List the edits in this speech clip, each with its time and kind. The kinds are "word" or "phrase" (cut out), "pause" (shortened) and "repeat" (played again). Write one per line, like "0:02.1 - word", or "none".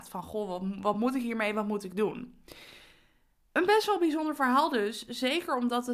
none

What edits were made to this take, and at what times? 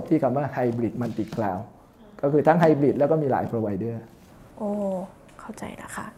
none

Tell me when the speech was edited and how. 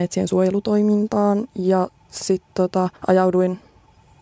0:03.0 - pause

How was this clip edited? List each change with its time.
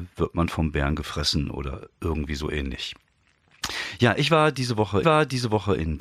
0:05.0 - repeat

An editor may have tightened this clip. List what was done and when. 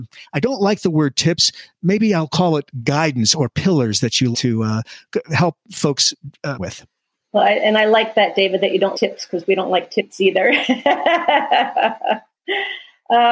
0:04.3 - word
0:06.6 - phrase
0:08.9 - word

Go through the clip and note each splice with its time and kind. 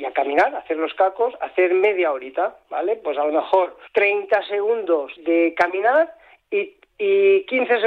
0:03.9 - pause
0:05.2 - word

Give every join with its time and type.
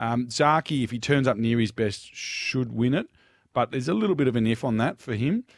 none

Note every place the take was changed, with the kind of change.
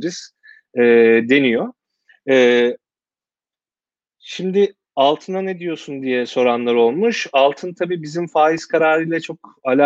none

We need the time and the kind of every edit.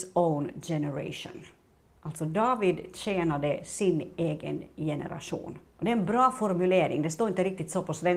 0:05.7 - pause

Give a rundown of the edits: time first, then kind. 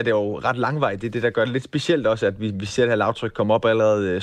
none

